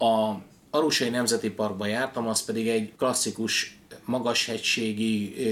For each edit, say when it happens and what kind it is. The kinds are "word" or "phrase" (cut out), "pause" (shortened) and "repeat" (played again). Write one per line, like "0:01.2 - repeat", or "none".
0:02.9 - pause